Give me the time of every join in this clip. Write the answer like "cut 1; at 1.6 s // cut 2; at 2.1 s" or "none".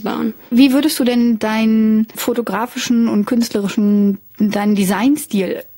none